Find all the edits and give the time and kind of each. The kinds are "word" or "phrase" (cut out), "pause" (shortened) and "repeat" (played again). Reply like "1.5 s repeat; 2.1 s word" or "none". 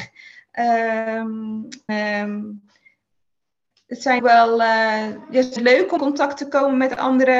1.9 s word; 4.2 s word; 5.6 s word; 6.0 s word